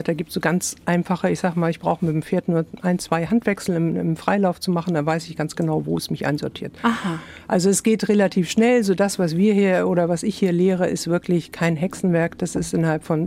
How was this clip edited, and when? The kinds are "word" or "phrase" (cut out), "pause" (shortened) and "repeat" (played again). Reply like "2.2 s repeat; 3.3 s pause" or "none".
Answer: none

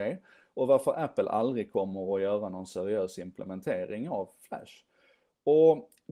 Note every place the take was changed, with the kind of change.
none

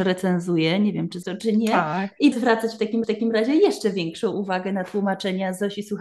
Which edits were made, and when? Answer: 1.2 s word; 2.3 s word; 3.0 s repeat

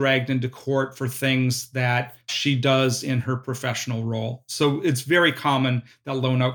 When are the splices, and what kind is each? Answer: 2.2 s pause

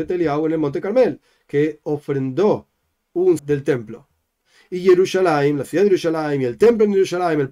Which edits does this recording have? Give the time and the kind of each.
3.4 s phrase

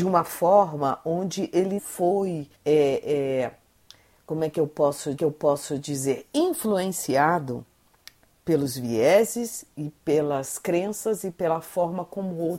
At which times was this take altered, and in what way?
1.8 s word; 2.5 s pause; 5.2 s repeat

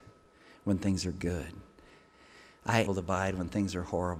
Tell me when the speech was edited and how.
2.9 s phrase

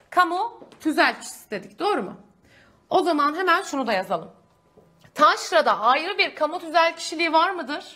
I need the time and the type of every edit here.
none

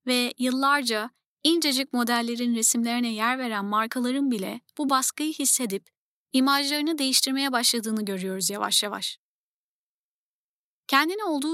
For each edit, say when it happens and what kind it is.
none

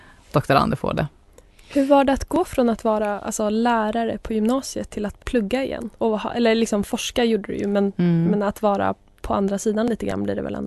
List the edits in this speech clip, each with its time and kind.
5.2 s word; 6.0 s pause

